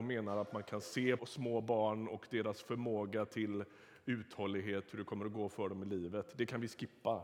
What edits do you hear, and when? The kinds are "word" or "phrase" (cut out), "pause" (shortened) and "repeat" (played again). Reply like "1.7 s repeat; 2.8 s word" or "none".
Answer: 1.2 s word